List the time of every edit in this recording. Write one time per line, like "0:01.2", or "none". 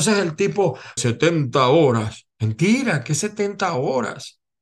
0:01.0